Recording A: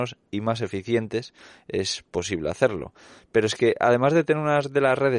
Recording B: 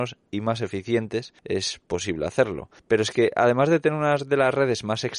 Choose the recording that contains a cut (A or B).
B